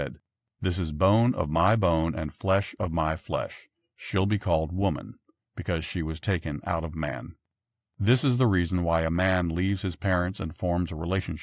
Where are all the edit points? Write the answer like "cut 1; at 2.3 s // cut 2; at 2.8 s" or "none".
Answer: none